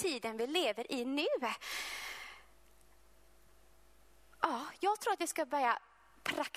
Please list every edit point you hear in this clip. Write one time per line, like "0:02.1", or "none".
none